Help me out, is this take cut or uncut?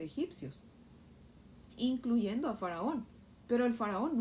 uncut